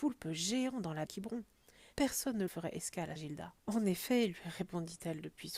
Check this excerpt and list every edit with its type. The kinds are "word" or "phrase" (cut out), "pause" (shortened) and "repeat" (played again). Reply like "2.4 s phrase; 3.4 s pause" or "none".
1.1 s phrase; 1.9 s pause; 2.5 s phrase; 3.2 s word; 3.6 s pause